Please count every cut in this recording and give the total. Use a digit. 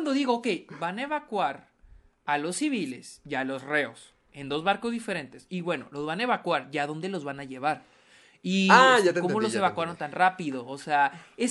0